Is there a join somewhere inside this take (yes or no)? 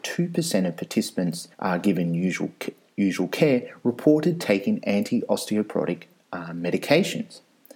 yes